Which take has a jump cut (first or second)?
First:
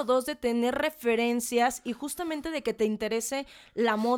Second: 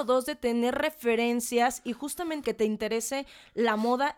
second